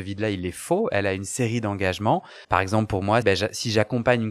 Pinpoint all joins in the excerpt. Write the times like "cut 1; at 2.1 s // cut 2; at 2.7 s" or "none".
cut 1; at 2.4 s // cut 2; at 3.2 s

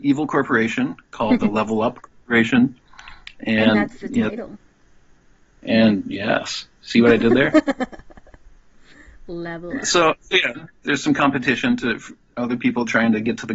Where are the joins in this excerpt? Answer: none

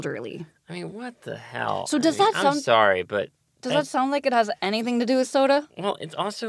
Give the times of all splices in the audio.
none

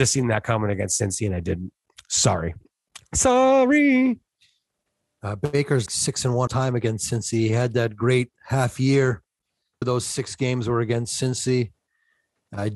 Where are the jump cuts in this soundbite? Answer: cut 1; at 5.9 s // cut 2; at 6.5 s // cut 3; at 9.8 s

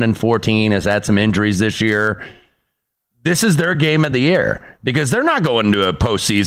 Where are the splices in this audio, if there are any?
none

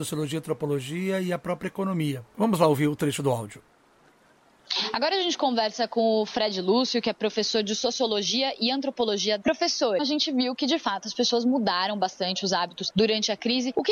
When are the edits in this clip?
cut 1; at 10.0 s

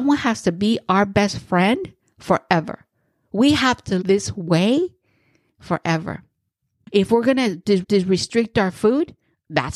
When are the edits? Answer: cut 1; at 4.0 s // cut 2; at 7.8 s

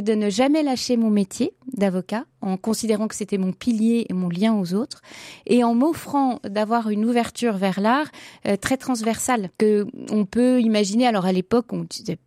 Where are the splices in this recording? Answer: cut 1; at 2.3 s // cut 2; at 9.5 s

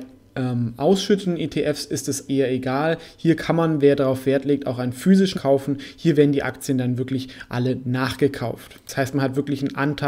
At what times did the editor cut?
cut 1; at 2.3 s // cut 2; at 5.3 s

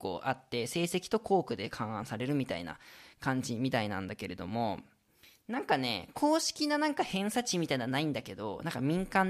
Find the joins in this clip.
none

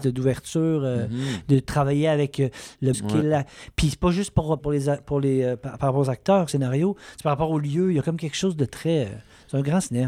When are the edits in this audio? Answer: cut 1; at 2.9 s // cut 2; at 4.6 s // cut 3; at 6.5 s

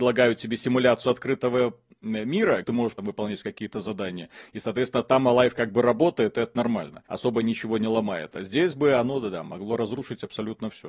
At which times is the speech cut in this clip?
cut 1; at 2.6 s // cut 2; at 3.0 s // cut 3; at 7.1 s

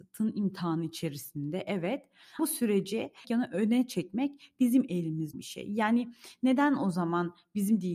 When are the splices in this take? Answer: cut 1; at 2.4 s // cut 2; at 3.2 s // cut 3; at 5.3 s

